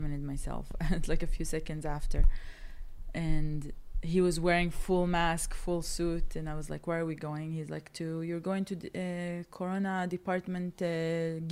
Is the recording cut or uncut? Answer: uncut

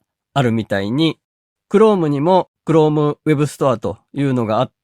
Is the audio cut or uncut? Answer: uncut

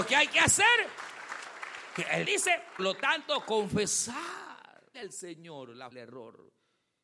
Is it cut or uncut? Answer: cut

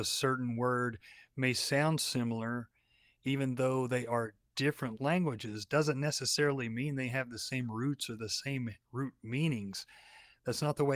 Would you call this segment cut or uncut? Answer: uncut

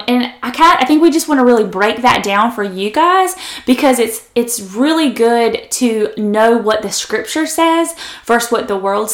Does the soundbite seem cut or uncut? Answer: uncut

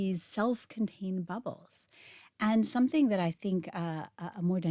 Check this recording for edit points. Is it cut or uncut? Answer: uncut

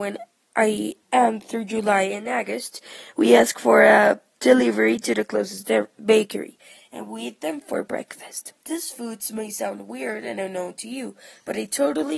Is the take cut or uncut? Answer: cut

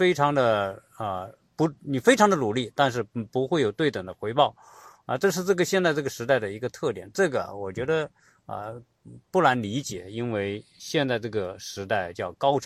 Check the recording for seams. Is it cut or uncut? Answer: uncut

